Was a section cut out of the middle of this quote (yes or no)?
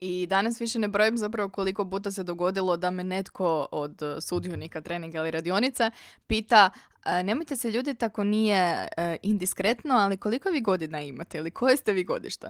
no